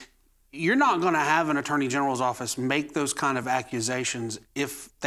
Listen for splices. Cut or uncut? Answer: uncut